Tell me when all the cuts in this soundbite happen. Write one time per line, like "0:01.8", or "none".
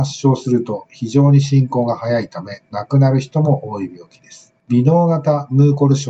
0:04.6